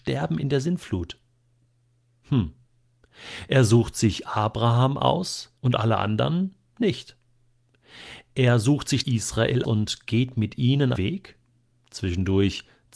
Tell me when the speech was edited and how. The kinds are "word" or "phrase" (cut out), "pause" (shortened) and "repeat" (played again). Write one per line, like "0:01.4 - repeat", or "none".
0:05.6 - pause
0:09.0 - phrase
0:09.6 - word
0:10.9 - phrase